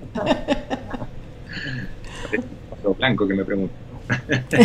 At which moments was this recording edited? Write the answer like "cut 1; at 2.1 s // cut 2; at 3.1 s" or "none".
none